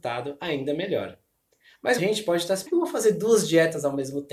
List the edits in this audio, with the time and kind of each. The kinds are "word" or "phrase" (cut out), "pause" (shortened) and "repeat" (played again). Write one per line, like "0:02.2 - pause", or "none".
0:02.0 - word
0:02.7 - phrase